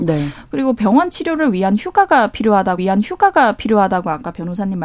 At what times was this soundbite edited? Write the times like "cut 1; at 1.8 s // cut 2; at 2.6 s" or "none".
cut 1; at 2.8 s

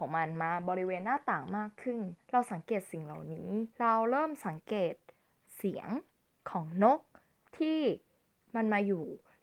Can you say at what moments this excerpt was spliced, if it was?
cut 1; at 2.2 s // cut 2; at 3.7 s

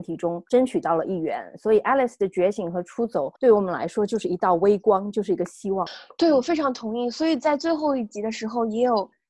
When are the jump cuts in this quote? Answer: cut 1; at 3.4 s

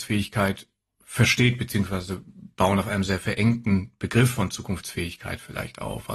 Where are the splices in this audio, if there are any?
none

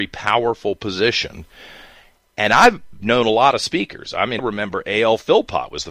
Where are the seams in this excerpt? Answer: cut 1; at 4.4 s

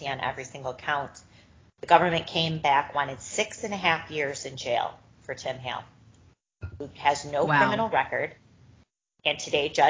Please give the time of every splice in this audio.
none

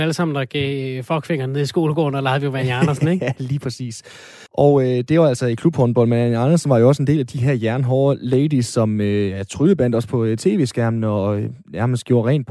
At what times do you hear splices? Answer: cut 1; at 4.5 s

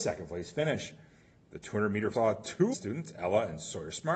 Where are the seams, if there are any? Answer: cut 1; at 2.1 s // cut 2; at 2.7 s

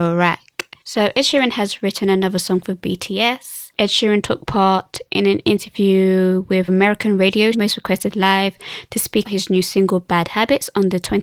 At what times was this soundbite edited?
cut 1; at 6.7 s // cut 2; at 7.5 s // cut 3; at 9.2 s

